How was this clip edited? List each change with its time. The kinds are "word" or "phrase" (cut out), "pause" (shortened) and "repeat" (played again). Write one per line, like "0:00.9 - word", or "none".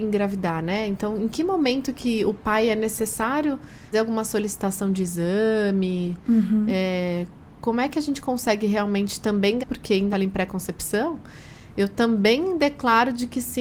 0:03.9 - word
0:09.6 - word
0:10.1 - phrase